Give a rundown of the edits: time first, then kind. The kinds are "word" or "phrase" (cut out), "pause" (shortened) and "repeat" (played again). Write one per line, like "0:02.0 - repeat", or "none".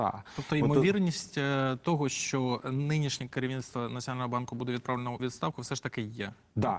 0:05.2 - word